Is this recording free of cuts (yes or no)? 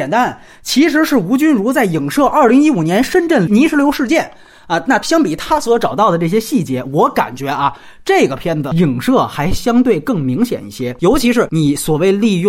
yes